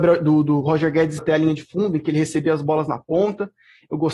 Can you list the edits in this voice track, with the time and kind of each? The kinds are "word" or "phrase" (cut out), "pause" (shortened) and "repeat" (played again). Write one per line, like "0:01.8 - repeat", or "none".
0:01.2 - word